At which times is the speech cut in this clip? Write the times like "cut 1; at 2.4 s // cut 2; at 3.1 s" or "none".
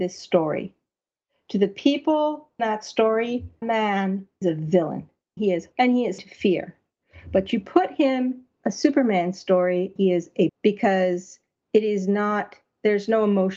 cut 1; at 2.6 s // cut 2; at 3.6 s // cut 3; at 4.4 s // cut 4; at 5.4 s // cut 5; at 5.7 s // cut 6; at 6.2 s // cut 7; at 8.5 s // cut 8; at 10.0 s // cut 9; at 10.5 s